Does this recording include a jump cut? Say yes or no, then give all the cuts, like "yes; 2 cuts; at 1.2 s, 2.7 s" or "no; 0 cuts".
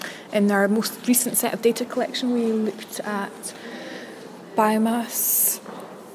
no; 0 cuts